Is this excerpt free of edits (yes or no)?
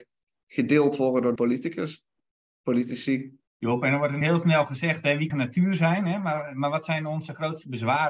no